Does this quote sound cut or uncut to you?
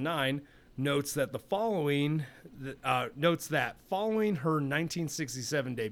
uncut